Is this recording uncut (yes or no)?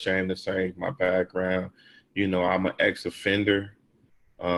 yes